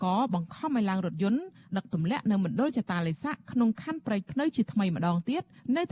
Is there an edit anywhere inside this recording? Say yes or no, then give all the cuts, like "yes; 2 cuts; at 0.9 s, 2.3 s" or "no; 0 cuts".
no; 0 cuts